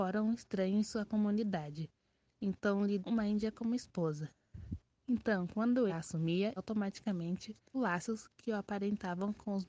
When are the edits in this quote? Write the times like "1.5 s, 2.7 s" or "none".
3.0 s, 5.9 s, 6.6 s, 7.7 s

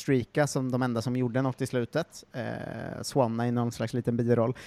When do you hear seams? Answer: none

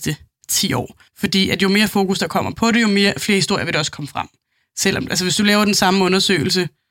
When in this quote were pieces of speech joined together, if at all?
1.1 s

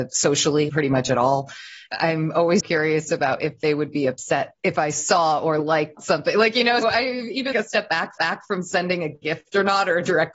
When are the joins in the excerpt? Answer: 2.6 s, 4.6 s, 6.0 s, 6.8 s, 7.5 s, 8.2 s

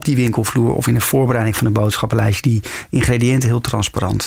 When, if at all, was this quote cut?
none

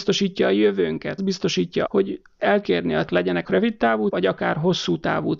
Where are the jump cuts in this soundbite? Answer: 1.2 s, 1.9 s, 2.6 s, 3.1 s, 3.4 s, 4.1 s

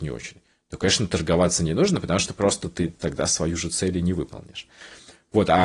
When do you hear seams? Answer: none

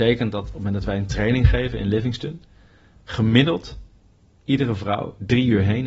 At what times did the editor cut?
none

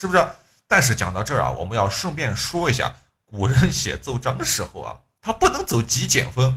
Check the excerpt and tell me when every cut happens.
none

